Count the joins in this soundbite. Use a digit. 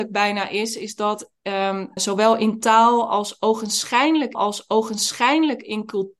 2